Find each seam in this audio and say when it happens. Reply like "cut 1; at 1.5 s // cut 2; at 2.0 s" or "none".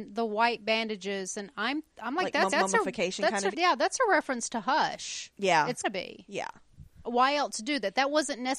cut 1; at 1.9 s // cut 2; at 2.5 s // cut 3; at 3.5 s // cut 4; at 5.8 s // cut 5; at 7.0 s